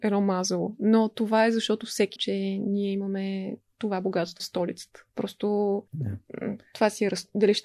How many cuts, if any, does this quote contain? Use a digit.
4